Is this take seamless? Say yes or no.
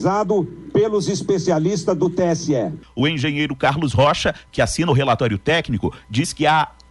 yes